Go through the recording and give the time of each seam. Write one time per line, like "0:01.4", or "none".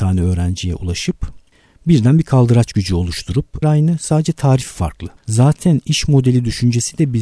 0:03.6
0:05.2

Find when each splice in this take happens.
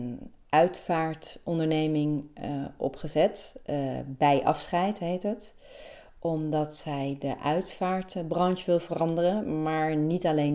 none

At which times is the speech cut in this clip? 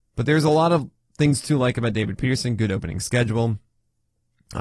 none

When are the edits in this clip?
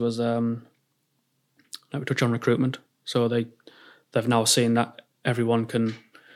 none

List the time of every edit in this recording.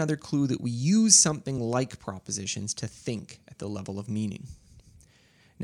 none

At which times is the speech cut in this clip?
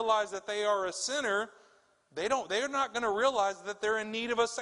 none

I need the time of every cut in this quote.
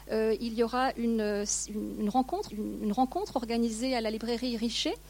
0:02.5

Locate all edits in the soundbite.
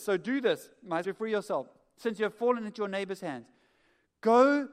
0:01.0

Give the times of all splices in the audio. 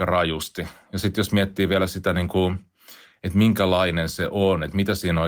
none

